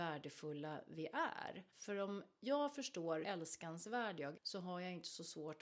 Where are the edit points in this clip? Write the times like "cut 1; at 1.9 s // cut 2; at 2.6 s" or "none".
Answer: cut 1; at 1.7 s // cut 2; at 3.2 s // cut 3; at 4.3 s